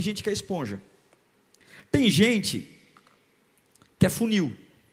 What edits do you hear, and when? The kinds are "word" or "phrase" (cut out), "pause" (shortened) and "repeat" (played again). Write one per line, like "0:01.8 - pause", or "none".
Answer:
none